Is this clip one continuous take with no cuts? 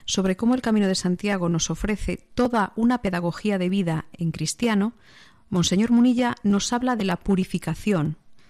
yes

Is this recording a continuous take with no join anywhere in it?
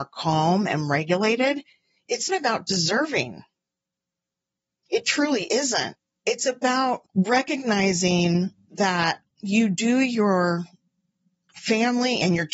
no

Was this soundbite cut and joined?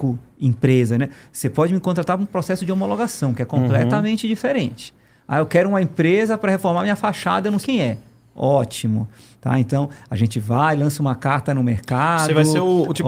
yes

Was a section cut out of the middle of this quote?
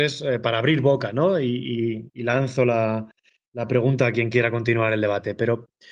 no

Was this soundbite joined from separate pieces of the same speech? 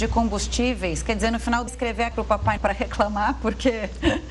yes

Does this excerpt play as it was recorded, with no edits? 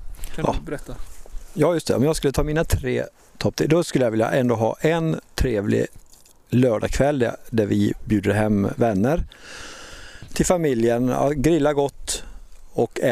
yes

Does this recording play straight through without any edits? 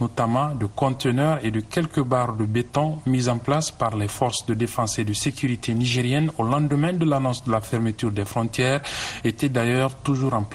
yes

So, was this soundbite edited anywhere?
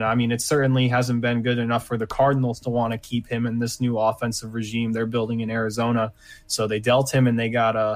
no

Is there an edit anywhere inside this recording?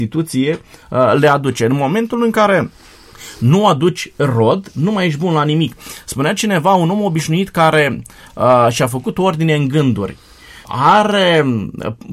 no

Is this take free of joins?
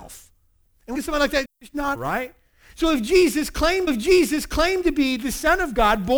no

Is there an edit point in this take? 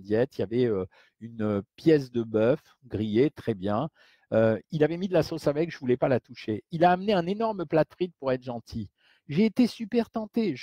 no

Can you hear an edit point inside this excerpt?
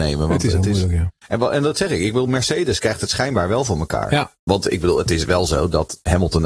no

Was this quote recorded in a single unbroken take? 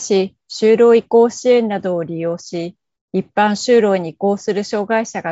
yes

